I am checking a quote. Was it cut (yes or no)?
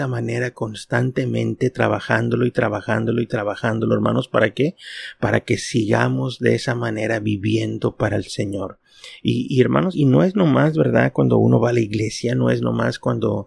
yes